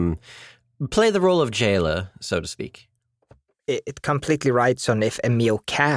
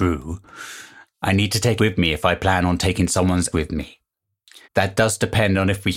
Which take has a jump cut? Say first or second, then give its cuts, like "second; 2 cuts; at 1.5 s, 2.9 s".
second; 3 cuts; at 1.8 s, 3.5 s, 4.6 s